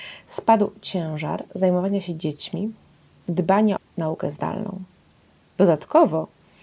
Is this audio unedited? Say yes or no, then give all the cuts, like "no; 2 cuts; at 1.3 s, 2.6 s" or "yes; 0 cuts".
no; 1 cut; at 3.8 s